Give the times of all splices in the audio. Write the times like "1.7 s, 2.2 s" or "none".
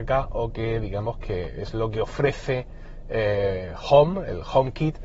none